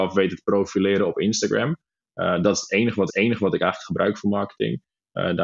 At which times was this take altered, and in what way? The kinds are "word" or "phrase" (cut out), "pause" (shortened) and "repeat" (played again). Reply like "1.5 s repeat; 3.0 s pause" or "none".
3.1 s repeat